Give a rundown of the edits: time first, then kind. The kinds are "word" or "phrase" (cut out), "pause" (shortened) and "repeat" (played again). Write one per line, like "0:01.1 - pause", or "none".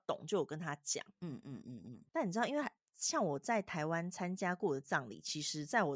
0:02.8 - pause